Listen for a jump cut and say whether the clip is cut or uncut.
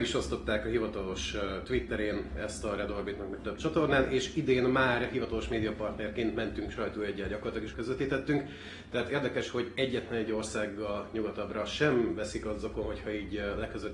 cut